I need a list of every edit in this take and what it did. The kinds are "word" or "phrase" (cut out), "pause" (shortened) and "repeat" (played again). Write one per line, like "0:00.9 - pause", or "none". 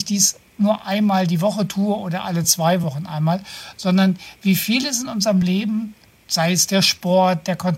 none